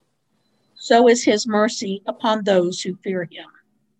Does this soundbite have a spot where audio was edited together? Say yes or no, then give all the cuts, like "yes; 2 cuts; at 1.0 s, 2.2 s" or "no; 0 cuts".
yes; 1 cut; at 2.0 s